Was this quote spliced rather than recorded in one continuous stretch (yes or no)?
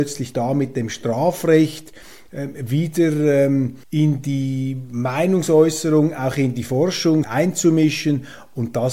yes